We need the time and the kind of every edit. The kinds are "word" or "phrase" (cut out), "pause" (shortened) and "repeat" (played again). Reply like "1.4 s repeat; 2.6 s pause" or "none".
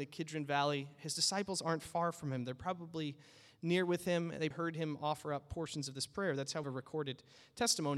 4.5 s word; 6.6 s phrase